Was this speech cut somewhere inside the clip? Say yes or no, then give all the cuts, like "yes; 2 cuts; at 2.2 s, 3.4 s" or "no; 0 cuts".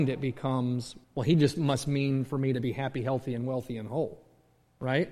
yes; 1 cut; at 1.0 s